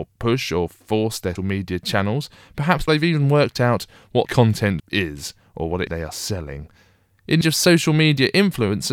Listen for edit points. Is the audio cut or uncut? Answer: cut